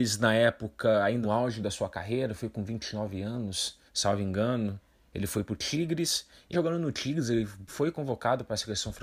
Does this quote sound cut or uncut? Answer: cut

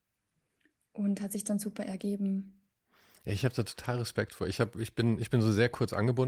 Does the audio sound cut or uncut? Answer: uncut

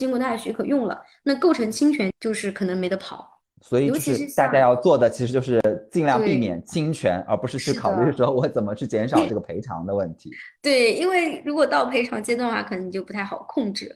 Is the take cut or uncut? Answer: cut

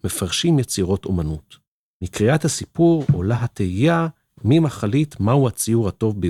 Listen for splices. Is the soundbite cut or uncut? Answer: uncut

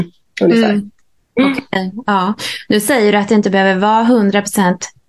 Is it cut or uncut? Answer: uncut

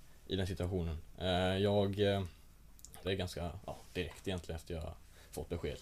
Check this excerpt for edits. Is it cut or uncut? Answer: cut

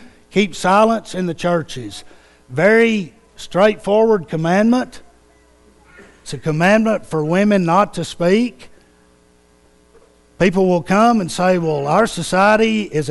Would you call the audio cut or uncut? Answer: uncut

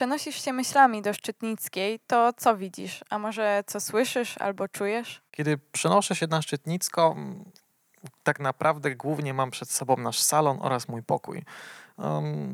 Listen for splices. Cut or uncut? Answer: cut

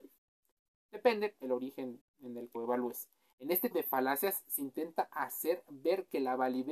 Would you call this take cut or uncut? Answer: cut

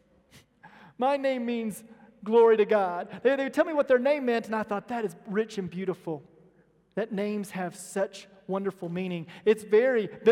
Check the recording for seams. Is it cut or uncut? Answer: uncut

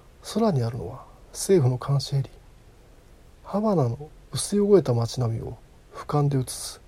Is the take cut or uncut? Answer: uncut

